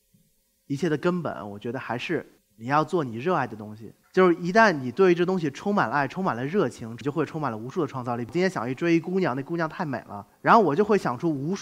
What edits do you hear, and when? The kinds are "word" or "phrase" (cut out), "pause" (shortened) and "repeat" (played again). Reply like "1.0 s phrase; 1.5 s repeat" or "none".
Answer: 2.4 s pause; 4.0 s pause